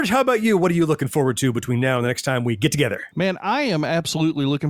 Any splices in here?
no; 0 cuts

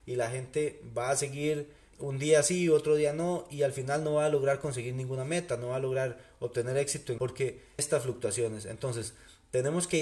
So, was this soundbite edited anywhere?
yes; 3 cuts; at 1.9 s, 7.2 s, 7.8 s

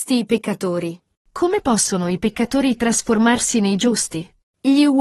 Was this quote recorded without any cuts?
yes; 0 cuts

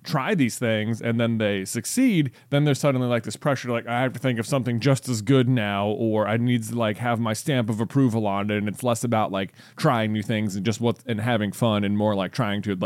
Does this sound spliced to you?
no; 0 cuts

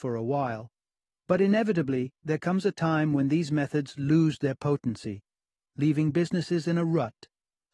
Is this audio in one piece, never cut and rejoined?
yes; 0 cuts

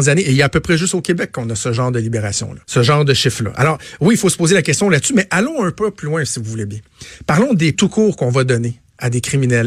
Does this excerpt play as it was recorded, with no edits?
no; 2 cuts; at 2.6 s, 7.7 s

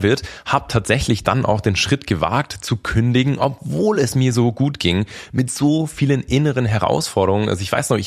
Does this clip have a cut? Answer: no; 0 cuts

